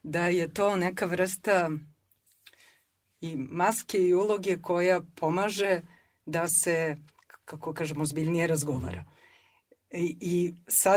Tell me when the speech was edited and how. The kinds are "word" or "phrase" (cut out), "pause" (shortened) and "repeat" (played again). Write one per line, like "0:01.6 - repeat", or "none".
none